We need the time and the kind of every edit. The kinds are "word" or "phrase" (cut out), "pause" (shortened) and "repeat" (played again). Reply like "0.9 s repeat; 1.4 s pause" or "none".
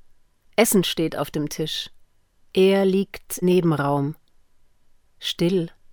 2.0 s pause; 3.4 s word

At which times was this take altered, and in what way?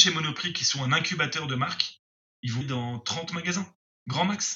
2.6 s word

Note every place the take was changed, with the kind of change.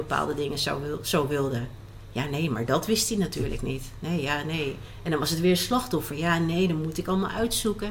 none

